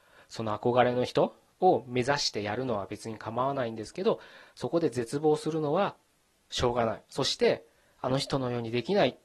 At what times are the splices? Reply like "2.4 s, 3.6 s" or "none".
7.1 s

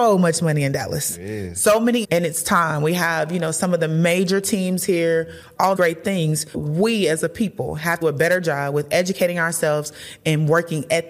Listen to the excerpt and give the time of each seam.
2.0 s, 5.8 s, 6.5 s, 8.0 s

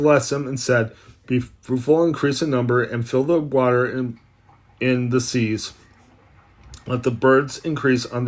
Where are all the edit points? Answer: none

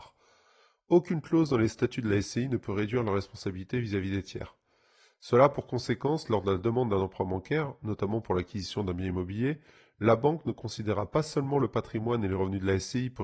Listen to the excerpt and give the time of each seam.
none

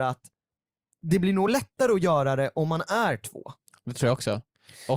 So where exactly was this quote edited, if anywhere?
none

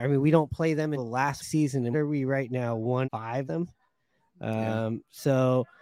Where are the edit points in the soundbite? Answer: 1.0 s, 1.4 s, 1.9 s, 3.0 s, 3.4 s

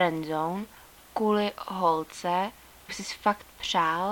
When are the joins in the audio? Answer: 2.9 s

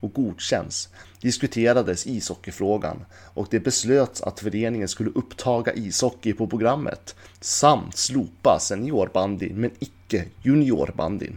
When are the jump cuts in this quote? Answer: none

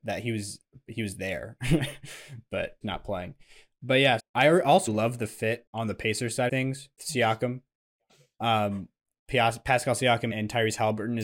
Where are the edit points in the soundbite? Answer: 2.8 s, 4.2 s, 4.9 s, 6.5 s, 7.0 s, 10.3 s

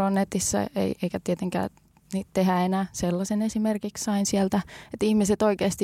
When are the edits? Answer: none

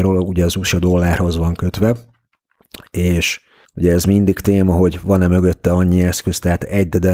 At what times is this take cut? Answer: 3.7 s

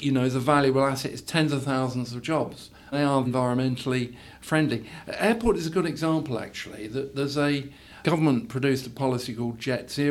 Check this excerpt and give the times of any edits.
2.9 s, 3.2 s, 8.0 s

